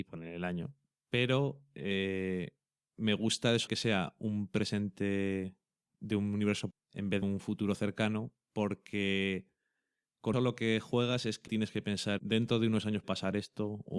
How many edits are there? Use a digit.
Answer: 7